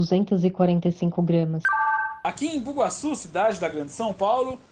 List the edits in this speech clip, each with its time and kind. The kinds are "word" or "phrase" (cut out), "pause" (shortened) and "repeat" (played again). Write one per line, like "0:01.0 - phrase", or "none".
none